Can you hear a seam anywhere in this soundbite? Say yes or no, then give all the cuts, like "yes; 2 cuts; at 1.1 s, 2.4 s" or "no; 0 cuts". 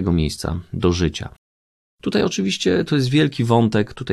no; 0 cuts